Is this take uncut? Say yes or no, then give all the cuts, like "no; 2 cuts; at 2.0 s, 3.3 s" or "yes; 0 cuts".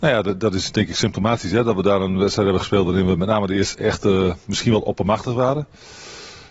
no; 1 cut; at 3.7 s